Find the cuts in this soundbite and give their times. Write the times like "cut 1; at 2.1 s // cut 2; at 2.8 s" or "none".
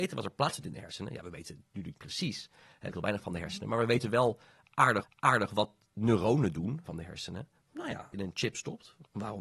cut 1; at 2.0 s // cut 2; at 2.9 s // cut 3; at 5.0 s // cut 4; at 6.9 s // cut 5; at 7.6 s // cut 6; at 8.1 s